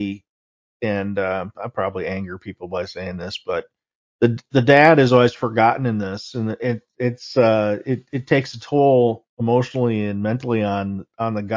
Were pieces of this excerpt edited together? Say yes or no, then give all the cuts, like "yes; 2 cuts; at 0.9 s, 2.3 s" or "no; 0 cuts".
no; 0 cuts